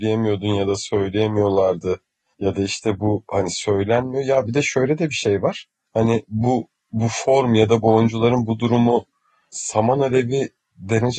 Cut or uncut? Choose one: uncut